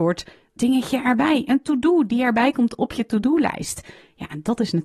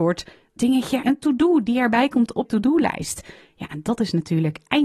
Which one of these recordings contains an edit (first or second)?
second